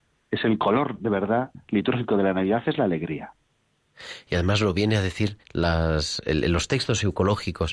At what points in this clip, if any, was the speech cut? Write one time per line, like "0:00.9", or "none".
0:05.4